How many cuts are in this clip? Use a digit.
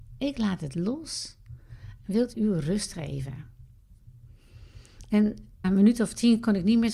2